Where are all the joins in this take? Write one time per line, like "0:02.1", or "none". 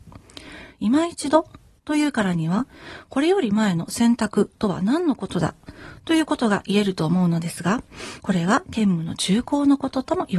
none